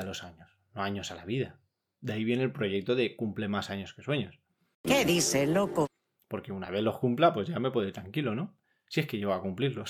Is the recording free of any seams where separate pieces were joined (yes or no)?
yes